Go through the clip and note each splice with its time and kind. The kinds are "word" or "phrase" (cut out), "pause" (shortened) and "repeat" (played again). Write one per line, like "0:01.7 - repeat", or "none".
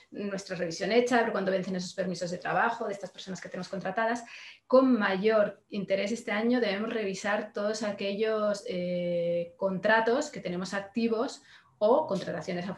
none